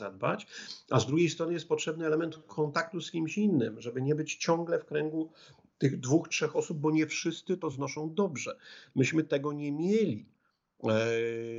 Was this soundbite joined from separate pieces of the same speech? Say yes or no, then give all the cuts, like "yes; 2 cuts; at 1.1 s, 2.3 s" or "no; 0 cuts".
no; 0 cuts